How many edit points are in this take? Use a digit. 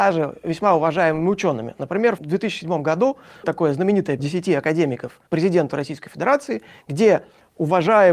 4